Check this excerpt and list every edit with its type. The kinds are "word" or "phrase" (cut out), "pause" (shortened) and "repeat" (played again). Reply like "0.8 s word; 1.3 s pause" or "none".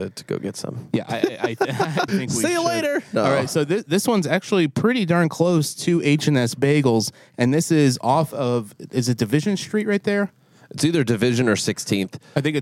2.1 s word